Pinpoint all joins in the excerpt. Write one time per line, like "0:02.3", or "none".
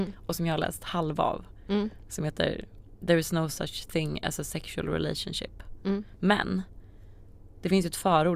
none